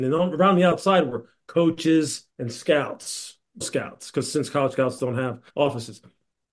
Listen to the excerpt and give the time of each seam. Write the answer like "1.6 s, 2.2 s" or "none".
2.3 s, 3.6 s, 5.5 s